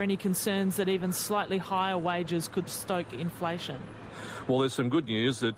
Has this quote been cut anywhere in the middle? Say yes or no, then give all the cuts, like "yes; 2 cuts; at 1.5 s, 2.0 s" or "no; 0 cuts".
no; 0 cuts